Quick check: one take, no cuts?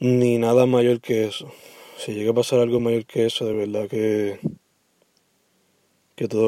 yes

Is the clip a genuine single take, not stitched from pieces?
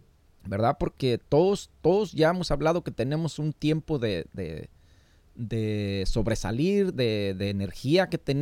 yes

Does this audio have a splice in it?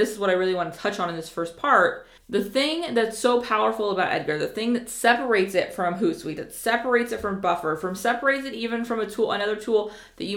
yes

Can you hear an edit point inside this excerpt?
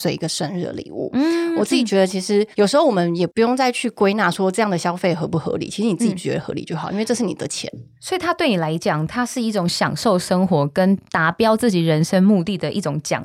yes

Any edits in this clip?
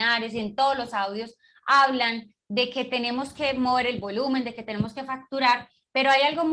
no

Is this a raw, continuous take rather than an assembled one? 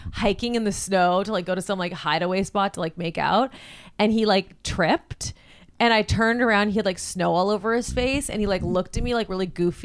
yes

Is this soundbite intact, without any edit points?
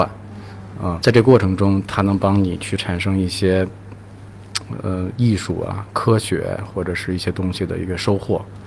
no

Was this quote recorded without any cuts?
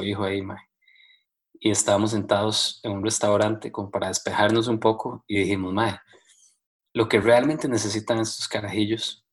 yes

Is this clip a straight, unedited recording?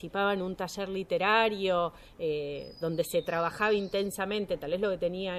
yes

